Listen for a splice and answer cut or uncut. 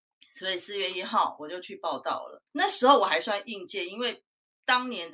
cut